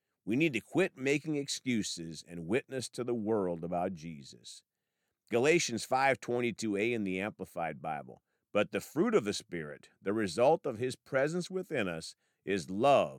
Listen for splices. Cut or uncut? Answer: uncut